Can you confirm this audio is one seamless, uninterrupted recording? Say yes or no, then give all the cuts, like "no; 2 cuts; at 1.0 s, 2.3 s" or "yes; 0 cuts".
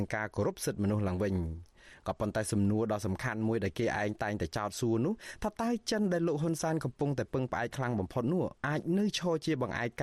no; 1 cut; at 8.6 s